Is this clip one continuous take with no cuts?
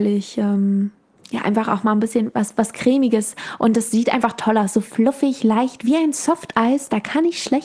yes; 0 cuts

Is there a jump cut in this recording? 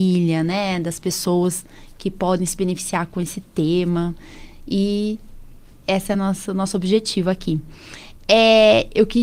no; 0 cuts

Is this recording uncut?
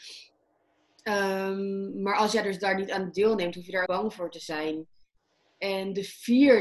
no; 1 cut; at 3.9 s

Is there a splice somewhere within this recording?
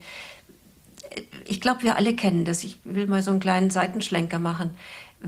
no; 0 cuts

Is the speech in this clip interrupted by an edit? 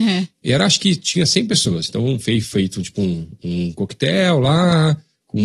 no; 0 cuts

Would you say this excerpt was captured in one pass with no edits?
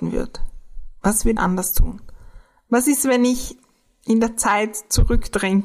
no; 1 cut; at 1.4 s

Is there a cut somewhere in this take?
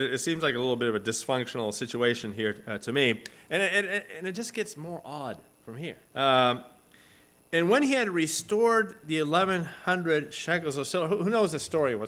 yes; 2 cuts; at 5.5 s, 6.1 s

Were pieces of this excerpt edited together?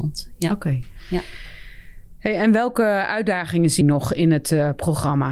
yes; 1 cut; at 3.8 s

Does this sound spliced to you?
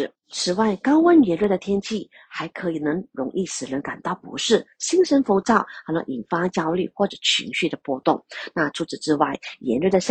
no; 0 cuts

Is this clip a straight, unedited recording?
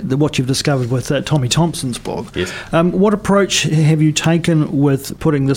yes; 0 cuts

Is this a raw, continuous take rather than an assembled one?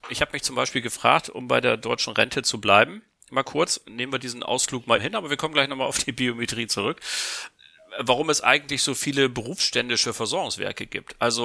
no; 1 cut; at 5.0 s

